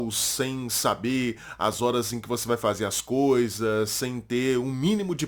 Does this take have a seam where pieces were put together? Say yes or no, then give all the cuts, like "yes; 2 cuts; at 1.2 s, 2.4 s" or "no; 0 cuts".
no; 0 cuts